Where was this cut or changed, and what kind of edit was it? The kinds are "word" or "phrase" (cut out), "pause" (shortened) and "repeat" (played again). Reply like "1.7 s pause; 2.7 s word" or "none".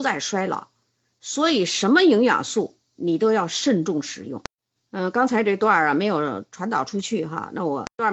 2.9 s pause; 4.8 s pause